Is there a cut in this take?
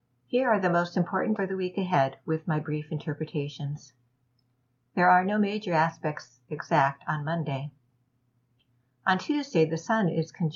yes; 1 cut; at 1.4 s

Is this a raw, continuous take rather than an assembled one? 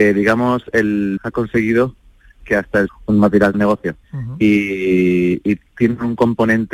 no; 5 cuts; at 1.2 s, 2.4 s, 2.9 s, 3.5 s, 4.0 s

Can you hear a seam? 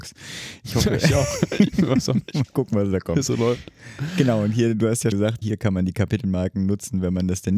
yes; 1 cut; at 5.1 s

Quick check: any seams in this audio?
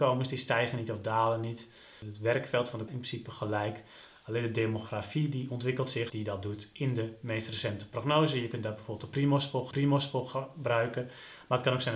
yes; 3 cuts; at 2.9 s, 6.1 s, 9.7 s

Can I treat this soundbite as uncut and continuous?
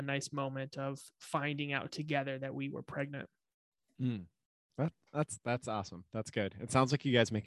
yes; 0 cuts

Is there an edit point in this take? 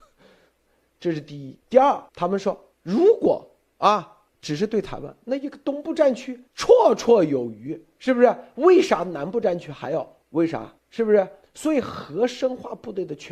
yes; 8 cuts; at 1.6 s, 2.1 s, 2.7 s, 4.3 s, 6.5 s, 10.2 s, 10.8 s, 11.4 s

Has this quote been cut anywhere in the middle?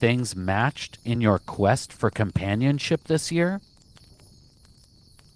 no; 0 cuts

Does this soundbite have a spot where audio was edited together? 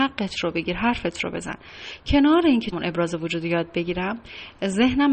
yes; 1 cut; at 2.7 s

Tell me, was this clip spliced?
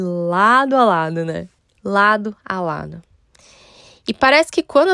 yes; 1 cut; at 1.6 s

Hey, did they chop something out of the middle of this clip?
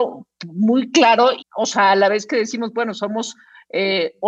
yes; 1 cut; at 1.4 s

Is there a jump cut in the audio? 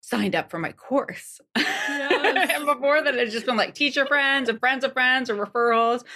no; 0 cuts

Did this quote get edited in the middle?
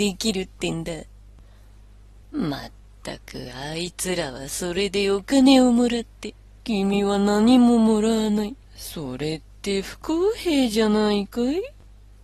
yes; 3 cuts; at 2.2 s, 6.6 s, 8.6 s

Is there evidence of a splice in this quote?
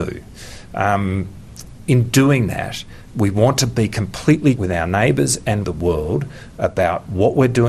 yes; 2 cuts; at 4.6 s, 5.6 s

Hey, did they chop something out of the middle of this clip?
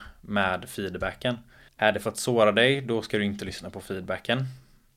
yes; 1 cut; at 1.7 s

